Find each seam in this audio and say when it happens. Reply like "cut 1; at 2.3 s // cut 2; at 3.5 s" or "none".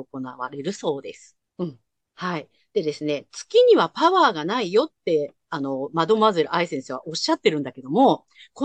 cut 1; at 1.5 s